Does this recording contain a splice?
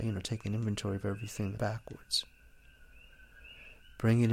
yes; 1 cut; at 1.6 s

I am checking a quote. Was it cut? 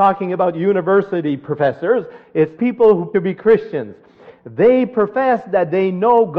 yes; 2 cuts; at 2.6 s, 3.1 s

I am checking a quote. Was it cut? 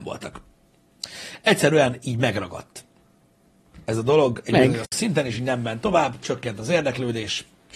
no; 0 cuts

